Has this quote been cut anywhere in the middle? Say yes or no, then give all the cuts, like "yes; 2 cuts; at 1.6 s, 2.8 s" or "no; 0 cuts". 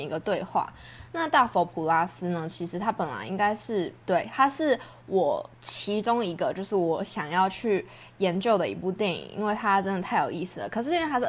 yes; 1 cut; at 4.0 s